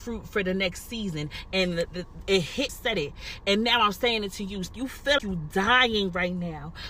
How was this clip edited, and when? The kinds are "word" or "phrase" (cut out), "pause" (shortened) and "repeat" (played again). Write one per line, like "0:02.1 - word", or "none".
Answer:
0:02.7 - phrase
0:05.2 - word